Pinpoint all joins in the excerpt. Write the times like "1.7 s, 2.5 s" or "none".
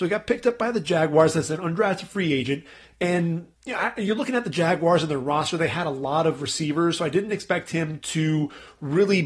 3.5 s